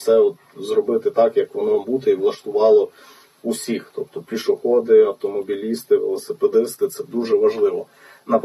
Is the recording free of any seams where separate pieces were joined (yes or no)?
no